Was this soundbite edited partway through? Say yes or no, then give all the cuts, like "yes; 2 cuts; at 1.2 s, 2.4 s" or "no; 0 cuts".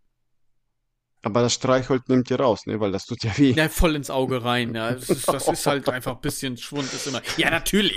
no; 0 cuts